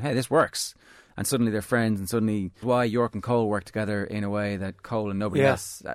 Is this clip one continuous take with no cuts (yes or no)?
no